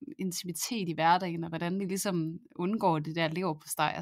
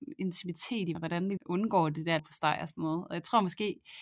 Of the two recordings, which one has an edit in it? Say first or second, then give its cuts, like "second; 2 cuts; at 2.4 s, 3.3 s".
second; 3 cuts; at 0.9 s, 1.4 s, 2.2 s